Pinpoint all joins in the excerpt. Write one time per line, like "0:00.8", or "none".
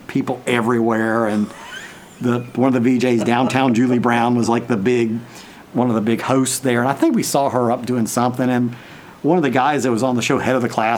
0:04.5